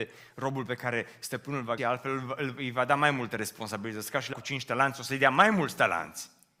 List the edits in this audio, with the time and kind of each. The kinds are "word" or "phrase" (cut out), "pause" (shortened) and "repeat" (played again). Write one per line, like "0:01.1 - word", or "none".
0:01.8 - word
0:04.3 - word